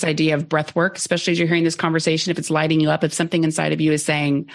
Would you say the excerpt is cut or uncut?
uncut